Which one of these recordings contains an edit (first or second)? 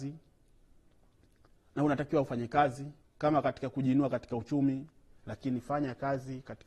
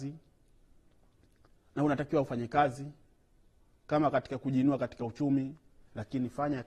first